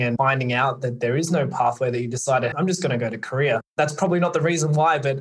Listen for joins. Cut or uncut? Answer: cut